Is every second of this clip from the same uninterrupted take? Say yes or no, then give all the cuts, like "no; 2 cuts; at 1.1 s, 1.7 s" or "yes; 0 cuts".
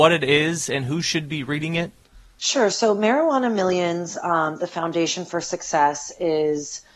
yes; 0 cuts